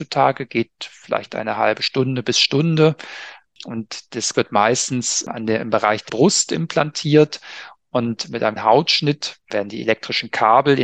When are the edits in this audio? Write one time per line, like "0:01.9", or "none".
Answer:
0:04.3
0:06.1
0:08.6